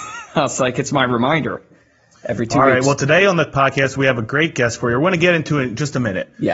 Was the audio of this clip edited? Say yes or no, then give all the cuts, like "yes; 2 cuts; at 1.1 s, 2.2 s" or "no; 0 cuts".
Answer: no; 0 cuts